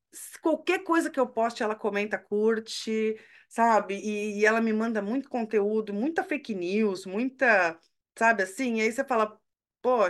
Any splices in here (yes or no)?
no